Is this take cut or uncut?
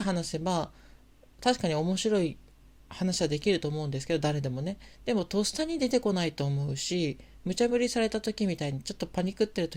uncut